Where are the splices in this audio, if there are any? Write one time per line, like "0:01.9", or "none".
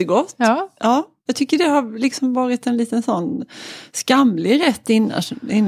none